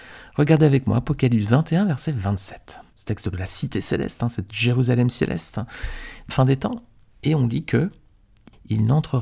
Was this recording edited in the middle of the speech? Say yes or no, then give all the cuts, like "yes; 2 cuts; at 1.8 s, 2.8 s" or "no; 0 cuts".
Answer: yes; 3 cuts; at 2.9 s, 3.3 s, 6.3 s